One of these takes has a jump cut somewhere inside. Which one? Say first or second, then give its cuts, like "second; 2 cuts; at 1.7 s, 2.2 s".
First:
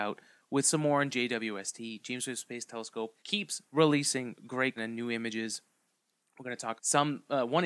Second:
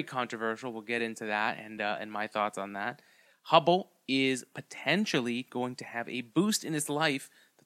first; 3 cuts; at 3.2 s, 4.8 s, 6.8 s